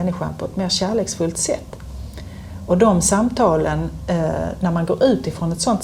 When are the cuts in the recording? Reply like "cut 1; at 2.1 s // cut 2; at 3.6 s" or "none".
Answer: none